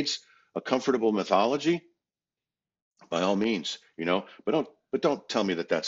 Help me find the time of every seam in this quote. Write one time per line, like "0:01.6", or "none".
none